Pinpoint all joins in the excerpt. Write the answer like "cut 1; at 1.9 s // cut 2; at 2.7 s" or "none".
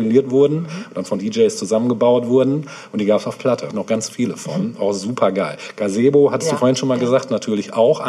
cut 1; at 1.2 s // cut 2; at 3.7 s